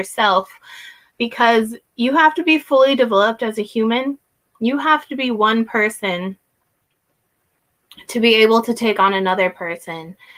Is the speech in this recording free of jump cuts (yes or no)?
yes